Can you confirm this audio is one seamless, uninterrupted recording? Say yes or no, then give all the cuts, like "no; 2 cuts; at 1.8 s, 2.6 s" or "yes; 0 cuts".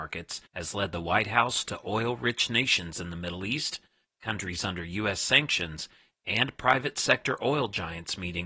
yes; 0 cuts